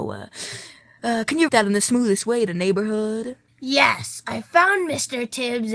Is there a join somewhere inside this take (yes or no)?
yes